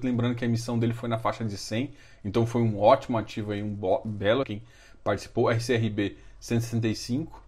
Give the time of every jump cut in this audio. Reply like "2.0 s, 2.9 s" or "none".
4.4 s